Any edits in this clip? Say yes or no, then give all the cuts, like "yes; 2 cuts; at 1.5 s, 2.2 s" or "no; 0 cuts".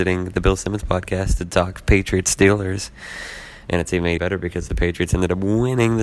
yes; 1 cut; at 4.2 s